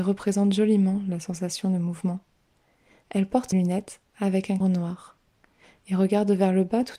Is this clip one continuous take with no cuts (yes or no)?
no